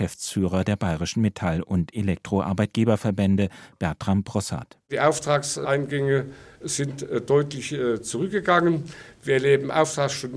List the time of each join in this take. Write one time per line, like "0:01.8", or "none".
none